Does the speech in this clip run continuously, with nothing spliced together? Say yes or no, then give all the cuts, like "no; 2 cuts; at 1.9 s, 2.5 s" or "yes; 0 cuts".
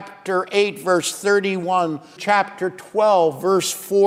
no; 1 cut; at 2.2 s